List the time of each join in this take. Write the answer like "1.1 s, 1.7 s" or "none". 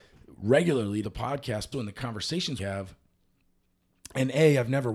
1.0 s, 1.7 s, 2.6 s